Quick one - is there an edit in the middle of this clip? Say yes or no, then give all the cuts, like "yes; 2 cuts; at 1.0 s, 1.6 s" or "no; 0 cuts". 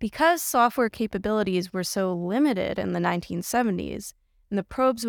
no; 0 cuts